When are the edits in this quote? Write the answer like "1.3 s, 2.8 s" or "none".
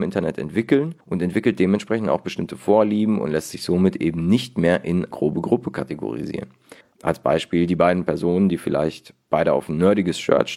1.0 s, 5.1 s, 6.8 s